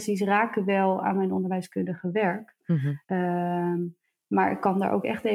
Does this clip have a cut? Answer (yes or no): yes